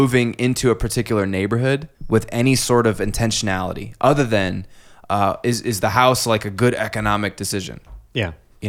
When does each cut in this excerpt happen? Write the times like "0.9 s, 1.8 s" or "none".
1.9 s

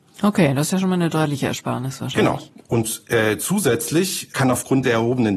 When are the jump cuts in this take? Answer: none

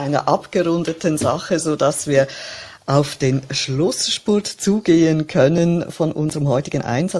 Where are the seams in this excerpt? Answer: none

